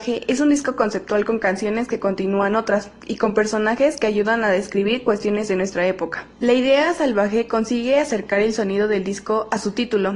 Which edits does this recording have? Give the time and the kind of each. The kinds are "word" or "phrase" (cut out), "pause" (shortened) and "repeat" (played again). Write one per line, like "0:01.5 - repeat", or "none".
0:06.3 - pause